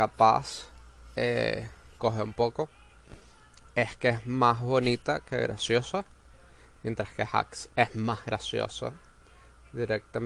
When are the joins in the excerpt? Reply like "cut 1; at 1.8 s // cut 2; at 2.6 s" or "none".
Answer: none